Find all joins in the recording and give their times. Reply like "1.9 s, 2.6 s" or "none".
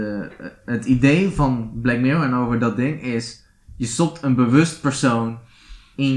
none